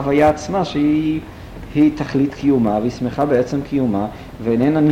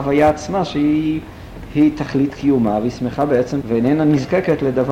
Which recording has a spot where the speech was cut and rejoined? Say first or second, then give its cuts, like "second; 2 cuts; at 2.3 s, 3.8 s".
second; 1 cut; at 3.6 s